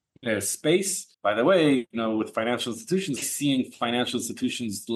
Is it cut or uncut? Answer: cut